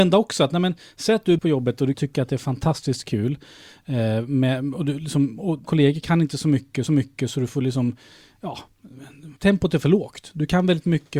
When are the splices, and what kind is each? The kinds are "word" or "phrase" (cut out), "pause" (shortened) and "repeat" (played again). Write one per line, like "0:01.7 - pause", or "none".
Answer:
0:01.4 - word
0:01.9 - phrase
0:05.6 - word
0:06.9 - repeat
0:09.4 - pause